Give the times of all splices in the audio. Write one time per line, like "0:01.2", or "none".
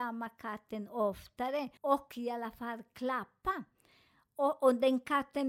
0:01.8